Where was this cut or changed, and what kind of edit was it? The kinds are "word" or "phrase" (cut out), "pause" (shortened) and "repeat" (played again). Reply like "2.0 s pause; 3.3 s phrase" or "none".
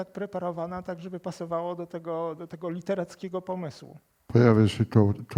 none